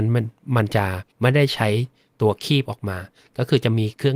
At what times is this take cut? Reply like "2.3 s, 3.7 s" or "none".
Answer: 1.1 s